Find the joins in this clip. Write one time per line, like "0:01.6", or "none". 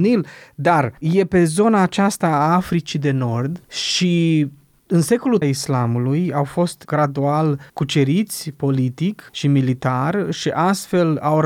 0:01.0
0:03.6
0:05.4
0:07.7
0:09.3

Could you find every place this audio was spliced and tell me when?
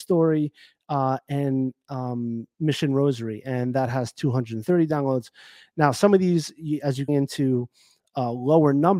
0:07.1

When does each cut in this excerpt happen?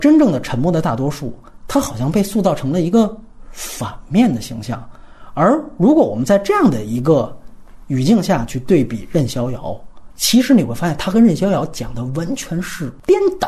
0:10.1

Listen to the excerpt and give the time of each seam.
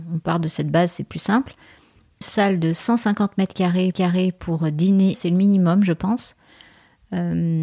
0:02.2
0:03.9
0:05.1

